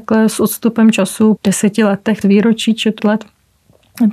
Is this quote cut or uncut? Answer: cut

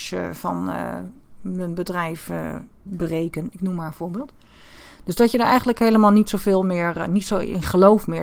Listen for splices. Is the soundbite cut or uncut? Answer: uncut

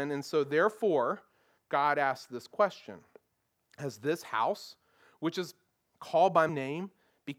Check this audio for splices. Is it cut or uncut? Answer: cut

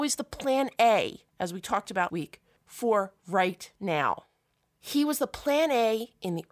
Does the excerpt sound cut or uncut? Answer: cut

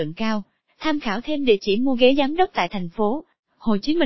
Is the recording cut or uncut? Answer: uncut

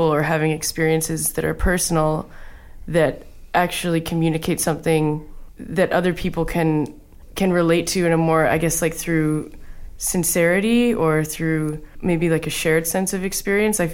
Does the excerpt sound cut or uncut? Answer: uncut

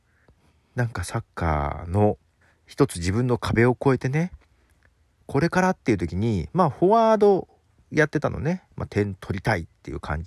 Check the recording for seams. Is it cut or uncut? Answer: cut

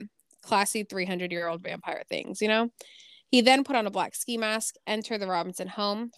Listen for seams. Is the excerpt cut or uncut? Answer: uncut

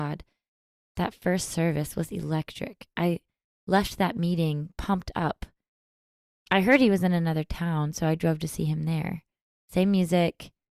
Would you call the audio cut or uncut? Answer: uncut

